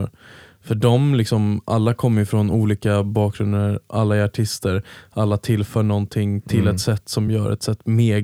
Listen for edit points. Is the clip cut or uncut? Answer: uncut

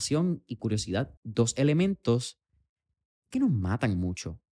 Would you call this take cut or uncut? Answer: cut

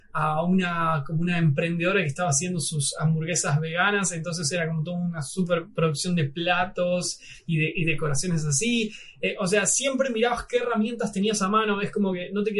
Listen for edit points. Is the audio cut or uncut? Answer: uncut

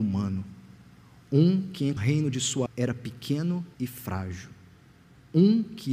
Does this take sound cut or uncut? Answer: cut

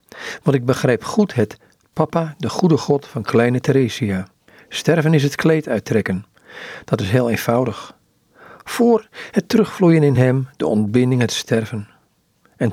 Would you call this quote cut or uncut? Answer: uncut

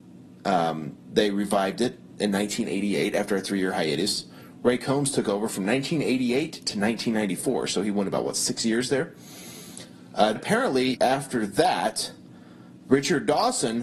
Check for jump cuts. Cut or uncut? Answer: cut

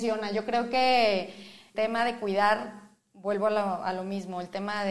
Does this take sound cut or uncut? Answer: cut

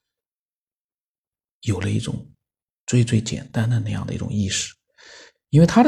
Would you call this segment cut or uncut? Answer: uncut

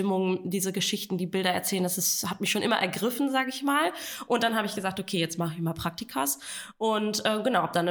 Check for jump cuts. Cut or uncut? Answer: uncut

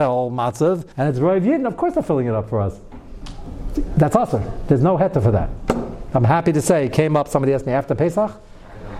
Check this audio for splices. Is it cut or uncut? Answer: cut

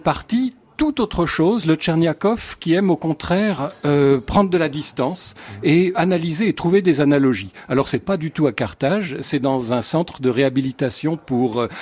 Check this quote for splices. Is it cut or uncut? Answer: cut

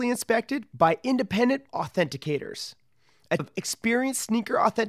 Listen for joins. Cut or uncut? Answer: cut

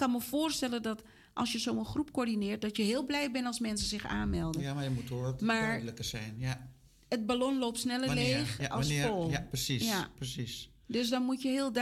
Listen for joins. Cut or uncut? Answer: uncut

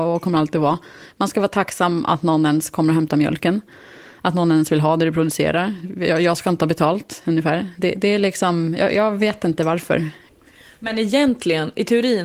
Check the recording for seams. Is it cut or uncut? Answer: uncut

